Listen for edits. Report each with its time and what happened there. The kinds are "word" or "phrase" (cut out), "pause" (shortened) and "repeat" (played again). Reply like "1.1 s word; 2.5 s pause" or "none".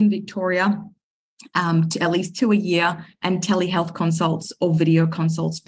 none